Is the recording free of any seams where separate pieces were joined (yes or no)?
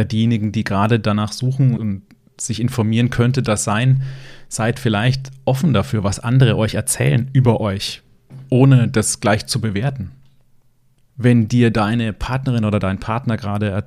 no